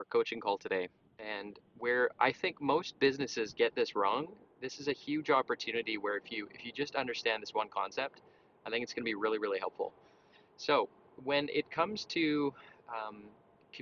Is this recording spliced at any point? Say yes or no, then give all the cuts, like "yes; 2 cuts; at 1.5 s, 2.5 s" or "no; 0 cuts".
no; 0 cuts